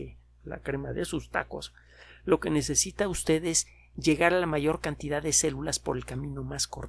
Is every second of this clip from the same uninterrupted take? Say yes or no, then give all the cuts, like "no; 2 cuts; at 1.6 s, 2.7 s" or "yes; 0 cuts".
yes; 0 cuts